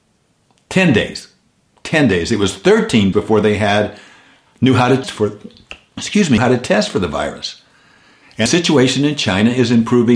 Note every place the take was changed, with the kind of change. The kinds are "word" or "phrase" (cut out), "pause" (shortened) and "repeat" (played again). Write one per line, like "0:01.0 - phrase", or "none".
0:03.1 - word
0:05.0 - word
0:06.4 - word
0:08.5 - word